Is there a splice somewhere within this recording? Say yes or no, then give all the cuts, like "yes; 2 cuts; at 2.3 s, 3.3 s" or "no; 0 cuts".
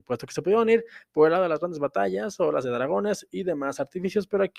yes; 1 cut; at 2.6 s